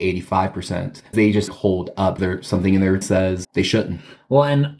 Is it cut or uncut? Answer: cut